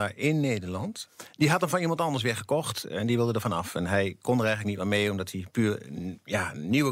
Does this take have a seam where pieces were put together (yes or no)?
no